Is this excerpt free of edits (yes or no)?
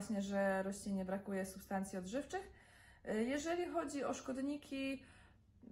yes